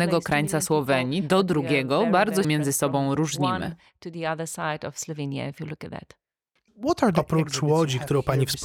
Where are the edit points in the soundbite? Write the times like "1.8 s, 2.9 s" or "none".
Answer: 2.4 s